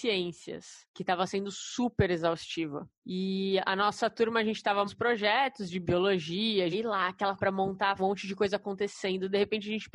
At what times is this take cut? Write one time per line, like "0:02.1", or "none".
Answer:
0:04.9
0:06.7
0:07.4
0:08.0